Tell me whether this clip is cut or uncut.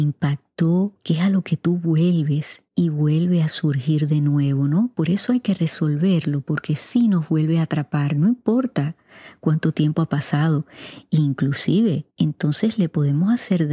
cut